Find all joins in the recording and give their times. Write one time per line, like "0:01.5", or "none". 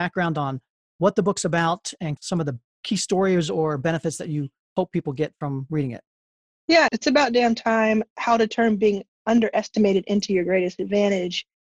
none

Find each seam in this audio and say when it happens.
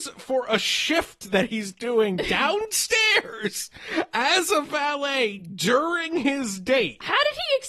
none

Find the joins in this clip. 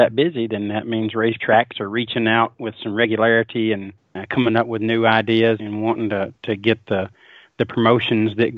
0:01.4
0:04.0
0:05.6

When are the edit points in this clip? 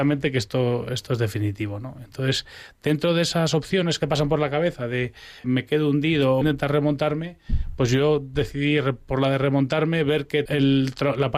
0:04.0
0:05.4
0:06.4
0:10.5

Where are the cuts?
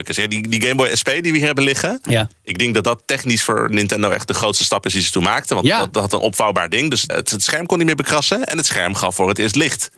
0:07.1

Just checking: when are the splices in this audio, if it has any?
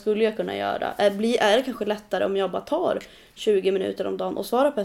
none

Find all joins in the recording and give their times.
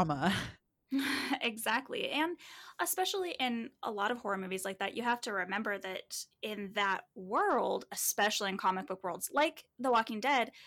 none

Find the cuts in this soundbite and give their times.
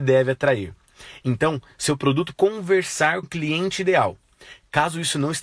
0:02.3
0:03.2

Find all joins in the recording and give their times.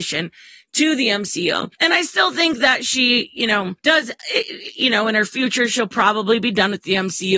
0:01.7
0:03.8

